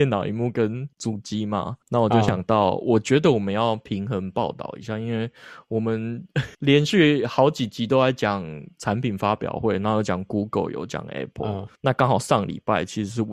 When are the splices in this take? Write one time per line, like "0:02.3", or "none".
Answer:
0:00.9
0:01.8
0:06.5
0:11.8